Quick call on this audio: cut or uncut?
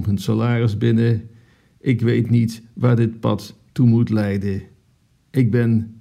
uncut